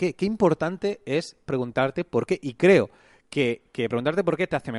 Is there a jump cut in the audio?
no; 0 cuts

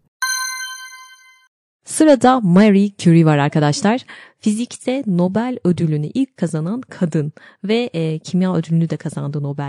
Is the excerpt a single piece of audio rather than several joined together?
yes; 0 cuts

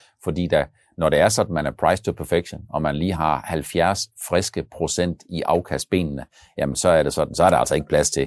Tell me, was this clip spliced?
no; 0 cuts

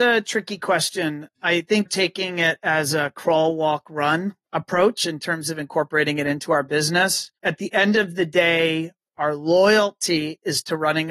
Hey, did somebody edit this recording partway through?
yes; 4 cuts; at 1.9 s, 4.4 s, 7.4 s, 9.1 s

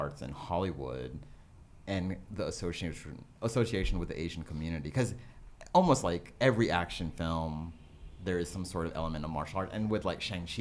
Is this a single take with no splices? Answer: yes; 0 cuts

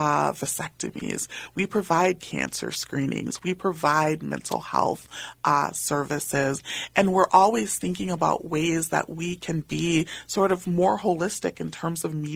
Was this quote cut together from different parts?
no; 0 cuts

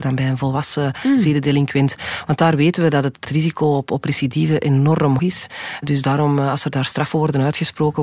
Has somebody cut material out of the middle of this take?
yes; 2 cuts; at 3.2 s, 5.2 s

